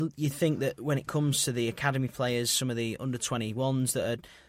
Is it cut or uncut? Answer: uncut